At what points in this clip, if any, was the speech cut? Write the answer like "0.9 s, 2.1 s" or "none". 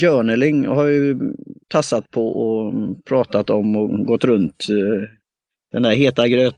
1.6 s